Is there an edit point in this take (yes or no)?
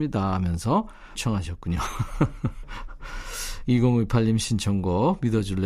yes